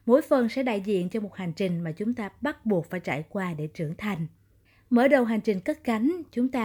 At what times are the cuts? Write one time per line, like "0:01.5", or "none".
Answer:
0:04.7